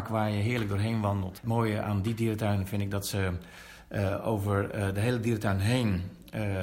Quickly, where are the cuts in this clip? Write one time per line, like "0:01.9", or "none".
none